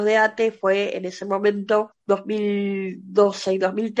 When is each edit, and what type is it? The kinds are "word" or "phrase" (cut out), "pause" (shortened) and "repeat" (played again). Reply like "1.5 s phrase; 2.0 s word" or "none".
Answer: 2.0 s pause